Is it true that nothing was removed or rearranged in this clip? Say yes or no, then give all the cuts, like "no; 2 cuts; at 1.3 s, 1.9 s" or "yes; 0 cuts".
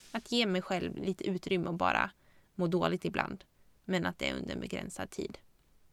yes; 0 cuts